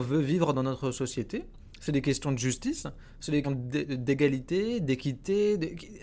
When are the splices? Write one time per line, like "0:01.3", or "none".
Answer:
0:03.4